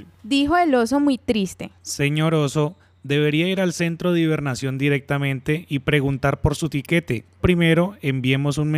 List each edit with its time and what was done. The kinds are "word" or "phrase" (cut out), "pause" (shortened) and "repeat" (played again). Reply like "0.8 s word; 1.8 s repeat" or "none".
1.8 s pause; 7.4 s word